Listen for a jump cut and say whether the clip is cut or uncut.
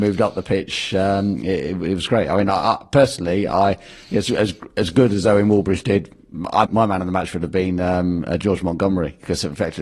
cut